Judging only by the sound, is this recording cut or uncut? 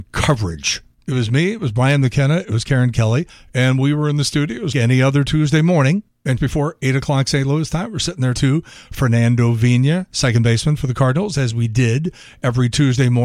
cut